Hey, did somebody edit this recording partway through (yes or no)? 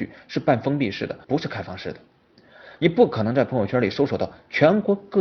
yes